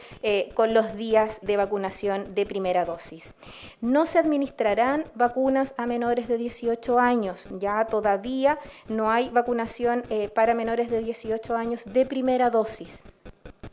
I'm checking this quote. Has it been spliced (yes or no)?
yes